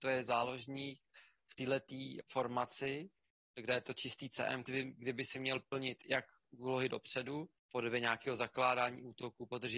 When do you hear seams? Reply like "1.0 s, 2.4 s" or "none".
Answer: 2.2 s, 4.7 s, 7.6 s